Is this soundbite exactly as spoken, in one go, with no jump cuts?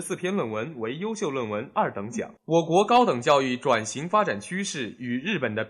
no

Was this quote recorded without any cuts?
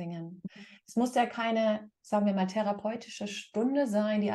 yes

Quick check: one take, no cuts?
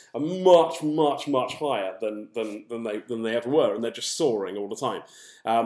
yes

